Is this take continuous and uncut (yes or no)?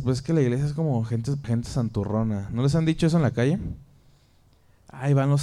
no